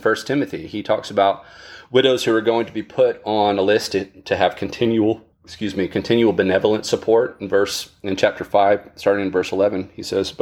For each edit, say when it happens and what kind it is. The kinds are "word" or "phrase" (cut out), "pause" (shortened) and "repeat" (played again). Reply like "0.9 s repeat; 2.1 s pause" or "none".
5.3 s pause